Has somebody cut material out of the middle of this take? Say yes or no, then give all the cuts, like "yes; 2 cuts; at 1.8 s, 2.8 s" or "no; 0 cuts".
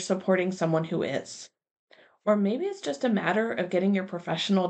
no; 0 cuts